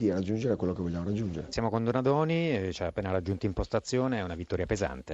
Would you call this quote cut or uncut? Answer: uncut